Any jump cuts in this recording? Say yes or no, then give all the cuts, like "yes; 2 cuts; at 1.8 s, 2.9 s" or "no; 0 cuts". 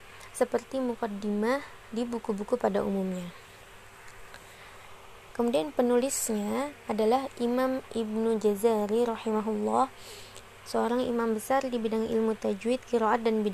no; 0 cuts